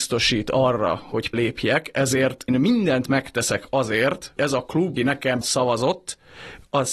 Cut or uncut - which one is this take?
cut